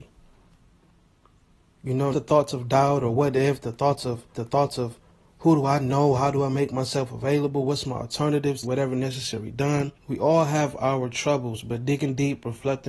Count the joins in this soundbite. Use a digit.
4